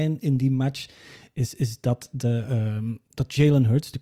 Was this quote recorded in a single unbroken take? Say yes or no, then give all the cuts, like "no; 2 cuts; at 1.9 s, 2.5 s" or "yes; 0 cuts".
yes; 0 cuts